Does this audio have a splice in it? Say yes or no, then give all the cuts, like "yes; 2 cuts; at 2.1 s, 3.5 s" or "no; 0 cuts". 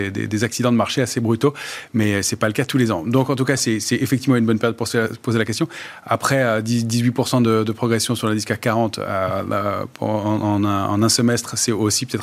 no; 0 cuts